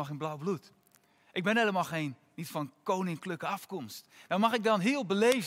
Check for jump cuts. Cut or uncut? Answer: uncut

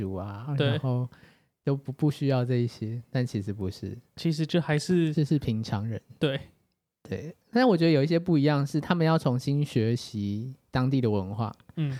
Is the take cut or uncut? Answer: uncut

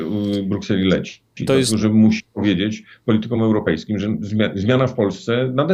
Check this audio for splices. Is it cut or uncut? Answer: uncut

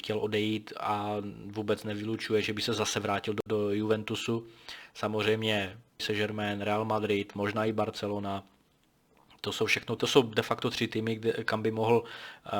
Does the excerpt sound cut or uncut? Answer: cut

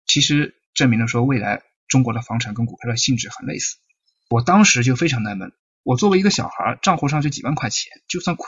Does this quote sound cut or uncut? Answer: uncut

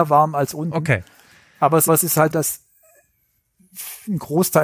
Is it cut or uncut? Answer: cut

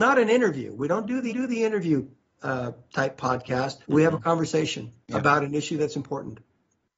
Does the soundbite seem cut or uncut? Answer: cut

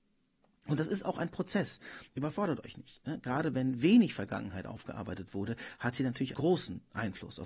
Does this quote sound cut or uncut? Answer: cut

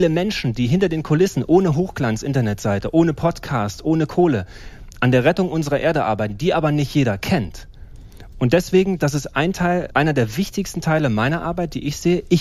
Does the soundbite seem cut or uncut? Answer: cut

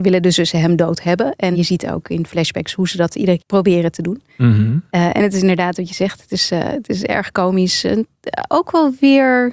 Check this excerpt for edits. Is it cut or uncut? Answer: cut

